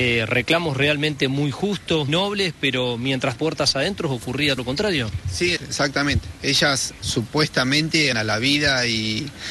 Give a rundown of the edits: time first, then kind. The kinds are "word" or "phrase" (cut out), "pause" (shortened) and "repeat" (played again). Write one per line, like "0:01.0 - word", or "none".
0:02.1 - word
0:03.3 - word
0:04.6 - word
0:05.6 - word
0:07.0 - word
0:08.1 - word